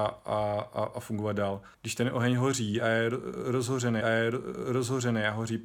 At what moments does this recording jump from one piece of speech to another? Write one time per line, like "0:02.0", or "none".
0:01.7
0:04.0